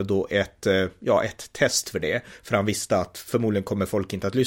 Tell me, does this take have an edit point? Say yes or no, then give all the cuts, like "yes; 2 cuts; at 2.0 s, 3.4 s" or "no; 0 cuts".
no; 0 cuts